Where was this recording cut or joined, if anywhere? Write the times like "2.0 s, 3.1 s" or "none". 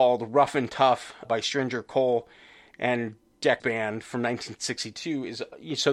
1.2 s, 3.6 s